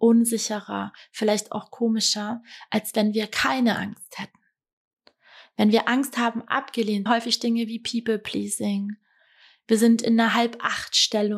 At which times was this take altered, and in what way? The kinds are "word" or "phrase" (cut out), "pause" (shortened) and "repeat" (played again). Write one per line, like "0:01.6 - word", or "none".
0:07.1 - phrase